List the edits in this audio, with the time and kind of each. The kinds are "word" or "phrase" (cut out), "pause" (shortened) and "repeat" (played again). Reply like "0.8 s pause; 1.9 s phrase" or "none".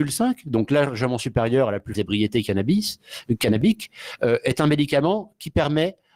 1.9 s phrase